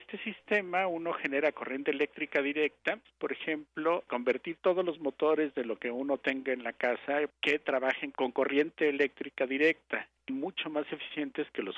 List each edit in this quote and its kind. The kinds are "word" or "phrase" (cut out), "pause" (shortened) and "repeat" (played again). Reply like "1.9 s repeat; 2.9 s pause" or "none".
10.3 s word

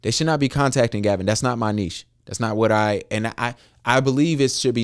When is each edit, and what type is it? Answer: none

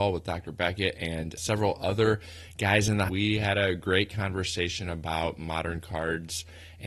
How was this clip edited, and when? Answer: 1.4 s word; 3.1 s phrase

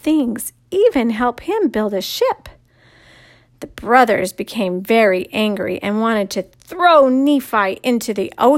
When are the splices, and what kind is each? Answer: none

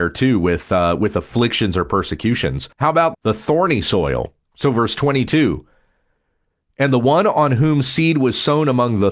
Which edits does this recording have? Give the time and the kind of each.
2.7 s pause; 3.1 s word; 4.4 s pause

